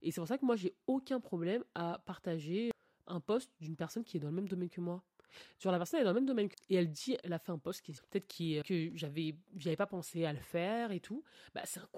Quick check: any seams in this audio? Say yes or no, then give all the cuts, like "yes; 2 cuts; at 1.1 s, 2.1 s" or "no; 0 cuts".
yes; 5 cuts; at 3.1 s, 6.5 s, 7.2 s, 8.0 s, 8.6 s